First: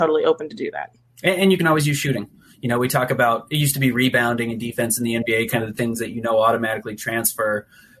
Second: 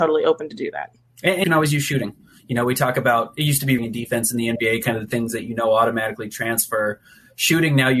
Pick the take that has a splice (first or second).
second